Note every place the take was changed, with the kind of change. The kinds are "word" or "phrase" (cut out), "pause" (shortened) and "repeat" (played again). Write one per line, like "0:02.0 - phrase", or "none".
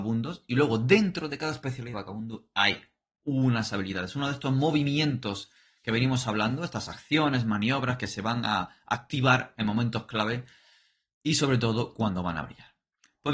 0:01.9 - word

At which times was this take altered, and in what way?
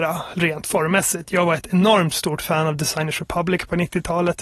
none

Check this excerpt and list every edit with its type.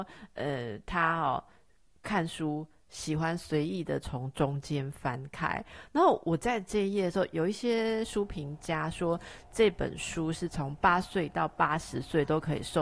0:07.3 - word

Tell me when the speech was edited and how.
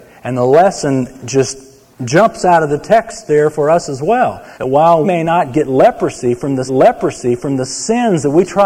0:01.9 - pause
0:04.5 - pause
0:05.0 - word
0:06.7 - repeat

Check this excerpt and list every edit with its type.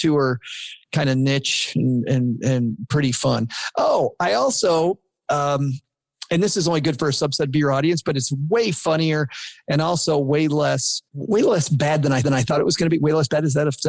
0:11.1 - pause
0:12.2 - repeat

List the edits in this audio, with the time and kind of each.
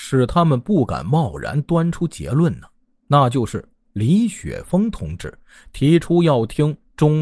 none

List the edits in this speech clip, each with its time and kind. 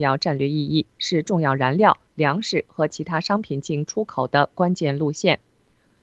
none

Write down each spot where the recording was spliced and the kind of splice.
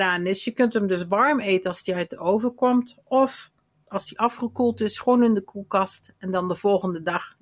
none

